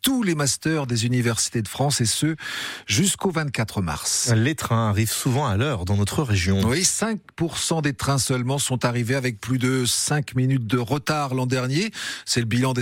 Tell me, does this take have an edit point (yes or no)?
no